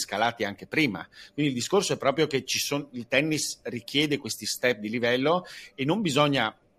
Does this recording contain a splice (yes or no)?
no